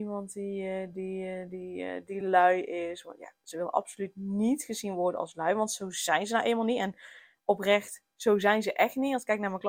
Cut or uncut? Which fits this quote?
uncut